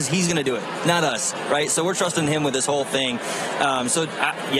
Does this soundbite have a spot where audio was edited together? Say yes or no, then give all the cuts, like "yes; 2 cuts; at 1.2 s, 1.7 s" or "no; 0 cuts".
no; 0 cuts